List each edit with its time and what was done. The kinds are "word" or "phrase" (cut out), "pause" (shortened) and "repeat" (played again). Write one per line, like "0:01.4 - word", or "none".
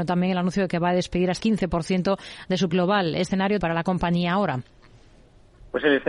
0:01.4 - word
0:02.7 - word
0:03.6 - word